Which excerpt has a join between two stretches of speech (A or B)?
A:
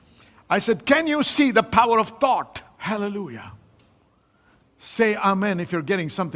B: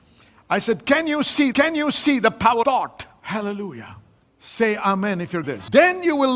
B